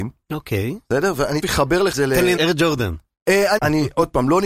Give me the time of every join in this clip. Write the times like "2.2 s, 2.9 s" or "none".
1.4 s, 1.9 s, 2.4 s, 3.6 s